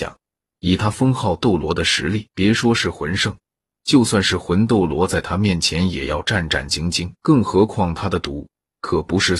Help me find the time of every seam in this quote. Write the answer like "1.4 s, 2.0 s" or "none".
2.3 s, 7.2 s